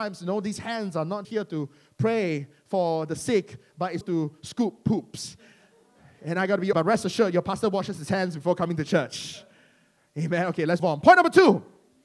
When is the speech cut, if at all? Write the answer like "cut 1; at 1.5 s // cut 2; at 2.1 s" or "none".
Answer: cut 1; at 1.2 s // cut 2; at 4.0 s // cut 3; at 6.7 s // cut 4; at 10.8 s